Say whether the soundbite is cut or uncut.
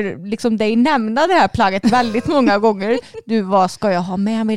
uncut